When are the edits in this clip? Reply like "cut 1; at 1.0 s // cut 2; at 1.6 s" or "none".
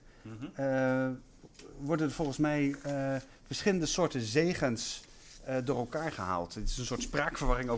none